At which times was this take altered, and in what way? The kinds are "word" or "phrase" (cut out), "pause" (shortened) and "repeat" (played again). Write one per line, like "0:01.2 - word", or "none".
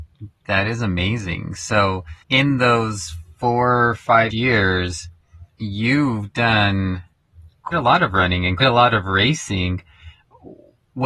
0:02.2 - pause
0:04.3 - word
0:05.5 - pause
0:07.7 - word
0:08.6 - word